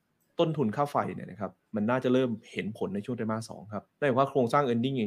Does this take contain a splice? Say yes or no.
yes